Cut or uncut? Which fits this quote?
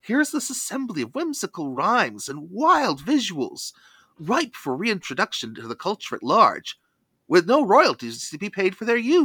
uncut